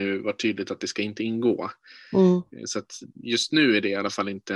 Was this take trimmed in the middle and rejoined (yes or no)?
no